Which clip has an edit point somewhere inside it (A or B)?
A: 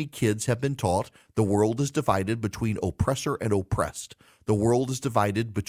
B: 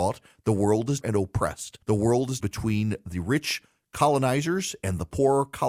B